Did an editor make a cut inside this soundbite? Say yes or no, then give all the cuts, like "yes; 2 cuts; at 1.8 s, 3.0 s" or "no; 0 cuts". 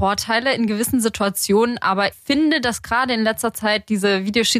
yes; 1 cut; at 2.1 s